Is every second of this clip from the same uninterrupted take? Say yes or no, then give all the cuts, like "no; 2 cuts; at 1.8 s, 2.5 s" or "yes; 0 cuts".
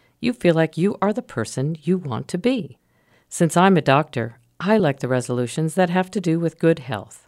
yes; 0 cuts